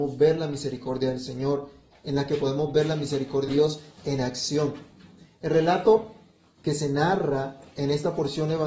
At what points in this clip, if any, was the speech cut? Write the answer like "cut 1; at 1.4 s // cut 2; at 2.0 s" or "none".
cut 1; at 3.5 s // cut 2; at 6.6 s